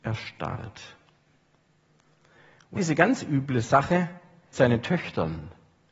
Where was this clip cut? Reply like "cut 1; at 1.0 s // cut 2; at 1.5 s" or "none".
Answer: cut 1; at 2.8 s // cut 2; at 4.5 s